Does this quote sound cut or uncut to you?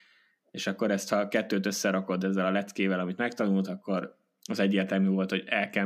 uncut